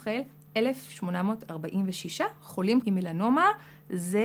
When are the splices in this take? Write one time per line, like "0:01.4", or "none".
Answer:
0:02.8